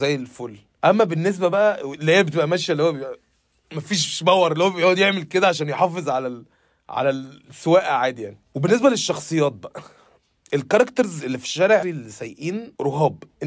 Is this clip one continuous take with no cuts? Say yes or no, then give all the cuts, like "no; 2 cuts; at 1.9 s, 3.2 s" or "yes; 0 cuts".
no; 1 cut; at 11.8 s